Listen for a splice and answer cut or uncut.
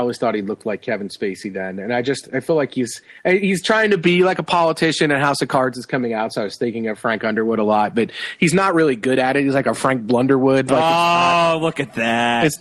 cut